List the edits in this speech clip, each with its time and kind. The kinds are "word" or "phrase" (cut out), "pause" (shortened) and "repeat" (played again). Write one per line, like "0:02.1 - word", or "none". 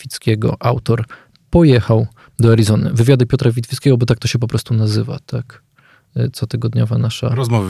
none